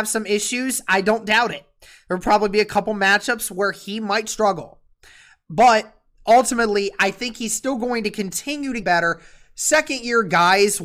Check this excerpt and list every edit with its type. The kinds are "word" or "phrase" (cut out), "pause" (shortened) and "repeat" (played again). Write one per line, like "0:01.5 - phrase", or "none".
0:08.8 - word